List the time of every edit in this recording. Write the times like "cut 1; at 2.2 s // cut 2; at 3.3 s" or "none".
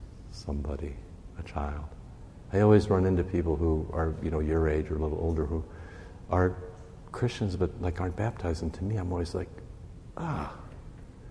none